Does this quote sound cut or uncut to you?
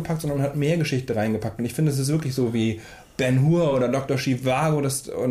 uncut